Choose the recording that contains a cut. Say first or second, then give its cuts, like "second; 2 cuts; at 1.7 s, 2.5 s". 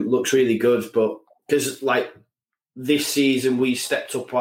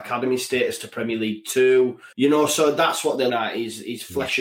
second; 2 cuts; at 2.1 s, 3.3 s